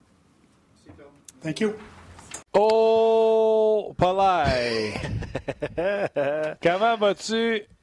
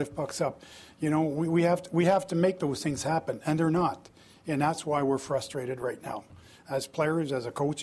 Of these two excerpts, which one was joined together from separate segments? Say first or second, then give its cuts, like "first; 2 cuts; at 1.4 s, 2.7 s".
first; 1 cut; at 2.5 s